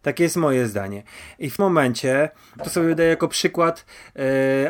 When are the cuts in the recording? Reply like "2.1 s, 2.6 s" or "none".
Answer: 1.6 s, 2.6 s